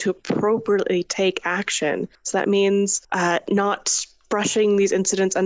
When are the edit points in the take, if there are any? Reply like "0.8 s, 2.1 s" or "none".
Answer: 2.1 s, 3.0 s